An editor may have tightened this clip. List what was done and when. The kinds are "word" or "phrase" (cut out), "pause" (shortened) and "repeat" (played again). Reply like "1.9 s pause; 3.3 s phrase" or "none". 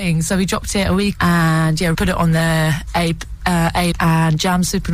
1.1 s word; 1.9 s word; 3.9 s word